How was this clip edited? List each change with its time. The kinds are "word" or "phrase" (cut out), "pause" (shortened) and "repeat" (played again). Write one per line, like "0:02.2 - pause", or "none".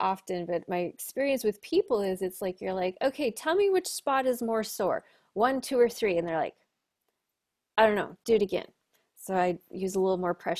none